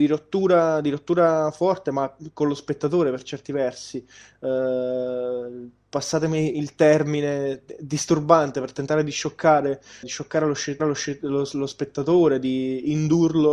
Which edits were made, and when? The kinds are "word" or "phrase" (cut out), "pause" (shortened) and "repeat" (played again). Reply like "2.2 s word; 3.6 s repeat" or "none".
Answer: 10.0 s word; 10.8 s repeat